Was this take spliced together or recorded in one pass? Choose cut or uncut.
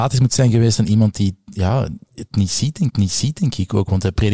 cut